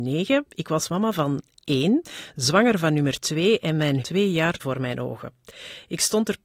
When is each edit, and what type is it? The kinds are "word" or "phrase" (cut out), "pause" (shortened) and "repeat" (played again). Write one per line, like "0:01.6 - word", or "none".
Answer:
0:04.0 - phrase
0:04.6 - word